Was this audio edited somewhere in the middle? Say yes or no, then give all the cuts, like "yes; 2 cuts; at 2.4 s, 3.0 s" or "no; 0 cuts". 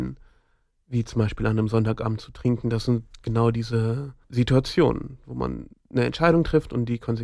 yes; 2 cuts; at 4.2 s, 5.7 s